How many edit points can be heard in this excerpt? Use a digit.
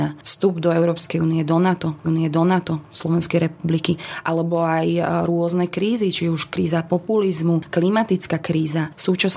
1